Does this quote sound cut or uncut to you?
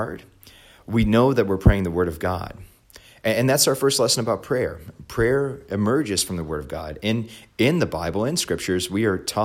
uncut